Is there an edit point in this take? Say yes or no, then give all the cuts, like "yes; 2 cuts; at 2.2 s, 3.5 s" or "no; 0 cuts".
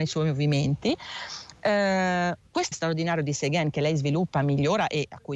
yes; 1 cut; at 2.7 s